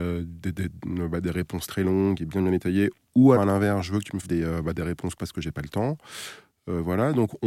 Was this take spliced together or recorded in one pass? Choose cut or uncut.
cut